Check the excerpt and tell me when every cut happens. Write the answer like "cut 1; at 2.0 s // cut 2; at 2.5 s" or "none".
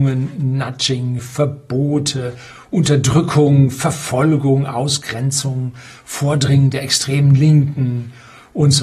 none